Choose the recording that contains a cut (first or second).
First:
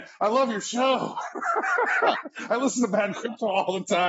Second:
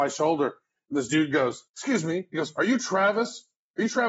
second